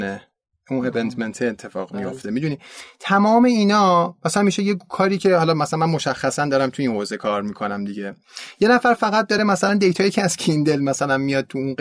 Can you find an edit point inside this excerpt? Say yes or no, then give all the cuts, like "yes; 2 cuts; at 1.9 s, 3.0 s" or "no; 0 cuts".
no; 0 cuts